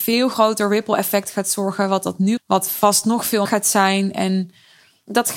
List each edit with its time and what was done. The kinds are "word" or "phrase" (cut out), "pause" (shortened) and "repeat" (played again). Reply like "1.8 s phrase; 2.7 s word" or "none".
2.4 s phrase; 3.5 s word